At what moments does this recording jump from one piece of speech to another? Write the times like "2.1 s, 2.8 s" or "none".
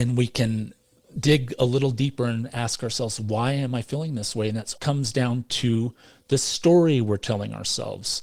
4.8 s